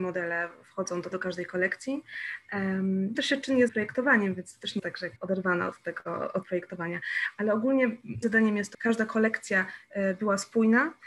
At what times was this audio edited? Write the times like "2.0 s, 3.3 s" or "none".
1.1 s, 3.2 s, 3.7 s, 4.8 s, 5.2 s, 6.4 s, 8.2 s, 8.7 s